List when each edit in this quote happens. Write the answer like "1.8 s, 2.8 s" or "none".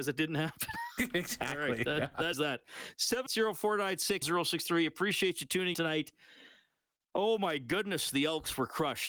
2.3 s, 3.3 s, 4.2 s, 5.7 s